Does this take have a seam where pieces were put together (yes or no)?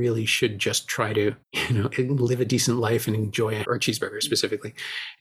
yes